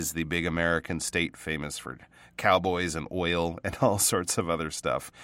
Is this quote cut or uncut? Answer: uncut